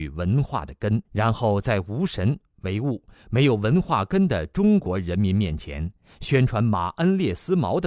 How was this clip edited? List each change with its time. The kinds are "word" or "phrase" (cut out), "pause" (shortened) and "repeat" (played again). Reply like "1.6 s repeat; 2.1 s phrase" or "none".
1.0 s pause